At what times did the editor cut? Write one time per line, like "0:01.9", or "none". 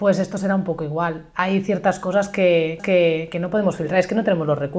0:02.8